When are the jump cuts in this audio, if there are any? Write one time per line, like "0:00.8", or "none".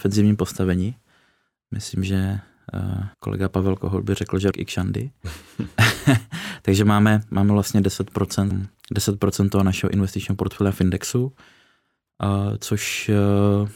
0:03.1
0:04.5
0:08.5

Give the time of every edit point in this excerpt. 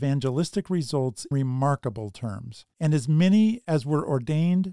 0:01.3

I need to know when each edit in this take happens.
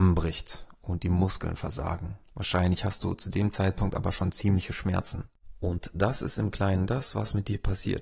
0:02.3

